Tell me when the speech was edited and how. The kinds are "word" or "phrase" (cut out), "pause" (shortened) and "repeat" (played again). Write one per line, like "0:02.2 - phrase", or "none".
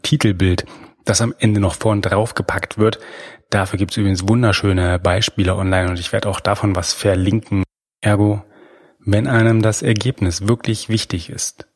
none